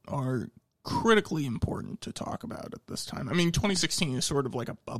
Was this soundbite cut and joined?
no; 0 cuts

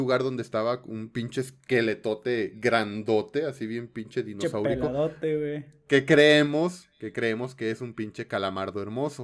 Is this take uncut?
yes; 0 cuts

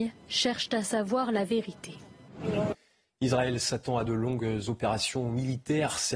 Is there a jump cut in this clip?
no; 0 cuts

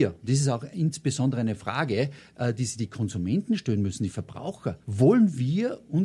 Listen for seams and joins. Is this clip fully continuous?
no; 1 cut; at 4.8 s

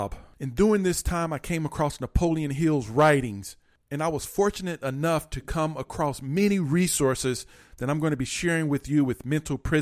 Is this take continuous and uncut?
yes; 0 cuts

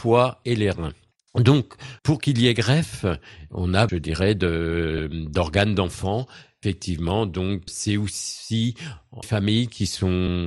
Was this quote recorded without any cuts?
no; 3 cuts; at 2.0 s, 3.9 s, 9.2 s

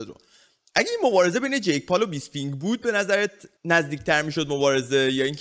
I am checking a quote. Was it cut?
yes; 1 cut; at 3.6 s

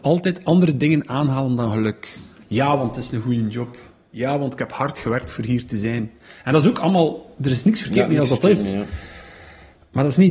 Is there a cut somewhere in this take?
no; 0 cuts

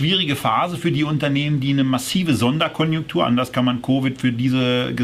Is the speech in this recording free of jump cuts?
yes; 0 cuts

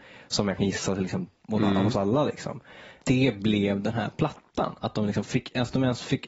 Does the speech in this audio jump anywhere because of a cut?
yes; 1 cut; at 1.4 s

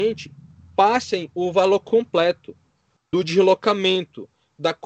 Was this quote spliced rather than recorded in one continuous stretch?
no; 0 cuts

